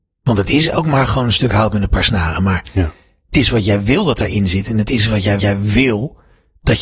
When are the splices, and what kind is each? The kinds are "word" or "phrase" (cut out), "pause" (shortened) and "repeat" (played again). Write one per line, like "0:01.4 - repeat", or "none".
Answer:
0:05.4 - repeat

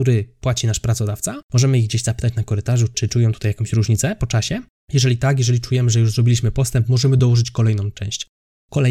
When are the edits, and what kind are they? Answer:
none

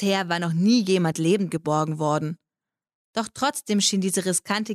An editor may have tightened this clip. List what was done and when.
none

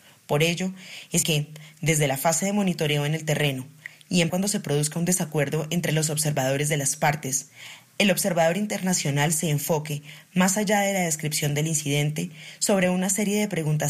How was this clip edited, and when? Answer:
0:01.2 - word
0:04.3 - word

